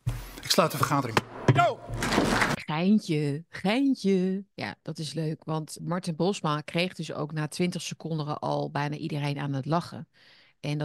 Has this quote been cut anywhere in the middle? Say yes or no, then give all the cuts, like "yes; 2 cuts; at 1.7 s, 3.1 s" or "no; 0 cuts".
yes; 2 cuts; at 4.5 s, 5.8 s